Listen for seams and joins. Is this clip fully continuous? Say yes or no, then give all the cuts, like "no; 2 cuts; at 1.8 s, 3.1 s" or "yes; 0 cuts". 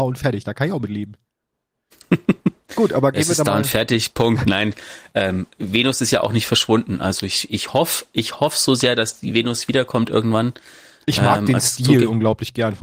yes; 0 cuts